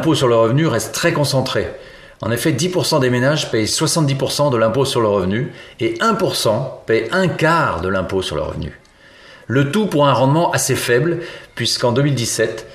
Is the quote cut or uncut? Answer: uncut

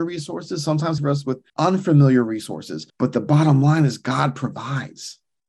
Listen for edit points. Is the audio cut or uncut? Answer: cut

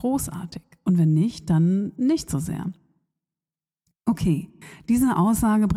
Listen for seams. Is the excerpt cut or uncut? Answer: uncut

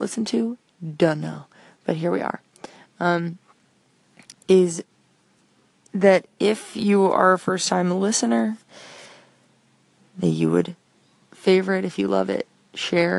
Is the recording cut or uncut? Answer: uncut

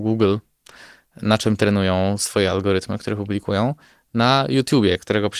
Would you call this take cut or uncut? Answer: uncut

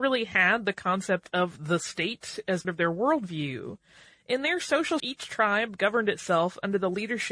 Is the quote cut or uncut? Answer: cut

